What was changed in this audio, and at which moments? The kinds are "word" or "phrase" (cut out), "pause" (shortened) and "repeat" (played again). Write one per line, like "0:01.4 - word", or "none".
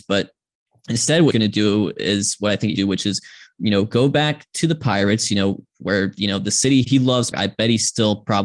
0:01.3 - word
0:02.8 - word
0:06.8 - word
0:07.3 - word